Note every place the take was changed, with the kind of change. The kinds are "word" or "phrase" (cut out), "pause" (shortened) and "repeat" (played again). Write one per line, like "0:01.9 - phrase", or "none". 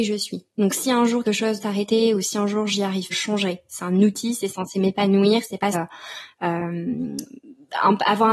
0:01.2 - word
0:01.6 - word
0:03.1 - phrase
0:05.7 - word